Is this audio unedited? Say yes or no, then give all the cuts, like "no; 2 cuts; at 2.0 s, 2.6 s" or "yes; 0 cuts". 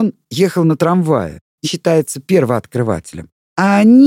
no; 1 cut; at 1.6 s